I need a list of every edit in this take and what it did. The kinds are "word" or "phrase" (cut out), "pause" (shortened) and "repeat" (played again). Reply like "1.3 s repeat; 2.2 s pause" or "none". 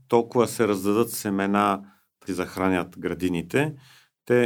2.3 s phrase